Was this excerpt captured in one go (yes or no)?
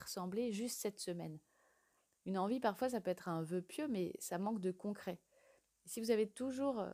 yes